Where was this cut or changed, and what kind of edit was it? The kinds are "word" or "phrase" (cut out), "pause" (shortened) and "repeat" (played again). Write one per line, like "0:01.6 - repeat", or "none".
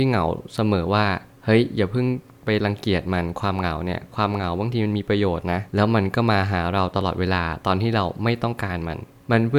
0:05.7 - pause